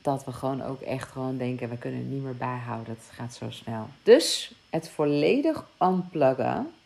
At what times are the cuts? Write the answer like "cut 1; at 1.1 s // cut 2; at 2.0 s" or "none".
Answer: cut 1; at 4.0 s